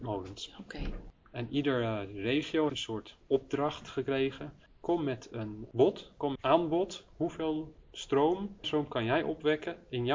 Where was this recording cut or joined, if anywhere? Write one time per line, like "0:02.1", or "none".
0:02.7
0:04.7
0:06.4
0:08.6